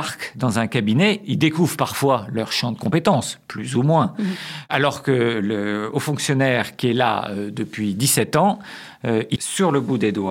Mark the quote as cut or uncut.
cut